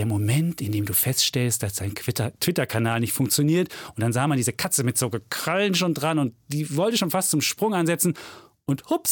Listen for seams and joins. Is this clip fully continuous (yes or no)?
yes